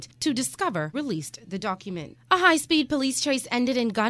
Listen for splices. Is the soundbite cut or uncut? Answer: cut